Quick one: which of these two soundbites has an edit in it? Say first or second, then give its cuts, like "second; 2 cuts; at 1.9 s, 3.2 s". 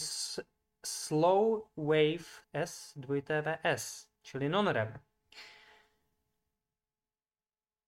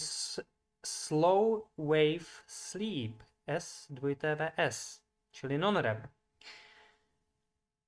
first; 2 cuts; at 2.4 s, 4.2 s